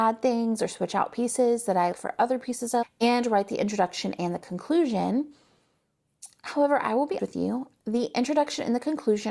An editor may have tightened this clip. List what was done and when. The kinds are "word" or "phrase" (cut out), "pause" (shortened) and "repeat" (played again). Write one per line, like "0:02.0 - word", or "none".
0:01.9 - word
0:02.8 - word
0:07.2 - word